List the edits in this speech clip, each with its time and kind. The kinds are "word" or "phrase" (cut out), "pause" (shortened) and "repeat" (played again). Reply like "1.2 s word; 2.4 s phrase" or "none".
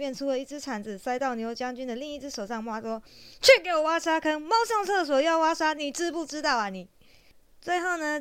none